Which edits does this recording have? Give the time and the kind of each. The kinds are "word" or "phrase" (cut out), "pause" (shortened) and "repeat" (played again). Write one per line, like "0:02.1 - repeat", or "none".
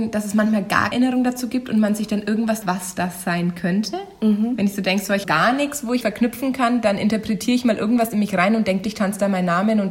0:00.9 - word
0:02.6 - word
0:05.2 - phrase
0:06.0 - phrase
0:08.8 - word